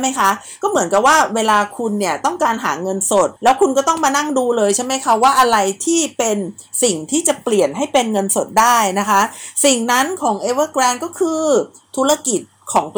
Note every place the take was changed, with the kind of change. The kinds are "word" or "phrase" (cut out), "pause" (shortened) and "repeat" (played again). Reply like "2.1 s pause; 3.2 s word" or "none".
3.4 s pause